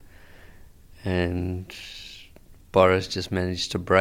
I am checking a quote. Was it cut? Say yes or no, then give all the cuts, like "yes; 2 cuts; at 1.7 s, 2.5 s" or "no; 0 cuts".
no; 0 cuts